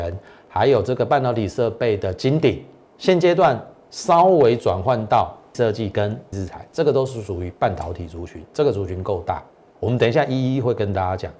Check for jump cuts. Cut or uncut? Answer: cut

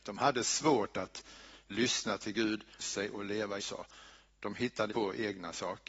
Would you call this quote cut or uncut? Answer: cut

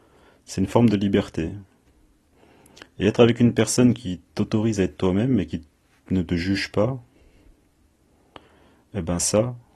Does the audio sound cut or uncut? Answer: uncut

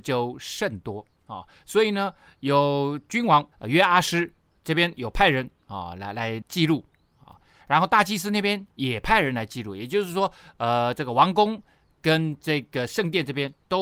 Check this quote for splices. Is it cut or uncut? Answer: cut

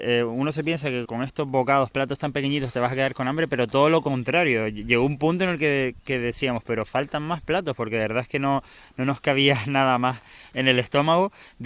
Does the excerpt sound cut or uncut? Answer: cut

